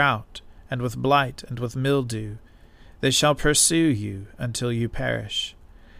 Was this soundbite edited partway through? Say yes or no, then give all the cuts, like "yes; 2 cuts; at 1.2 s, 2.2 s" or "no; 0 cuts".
no; 0 cuts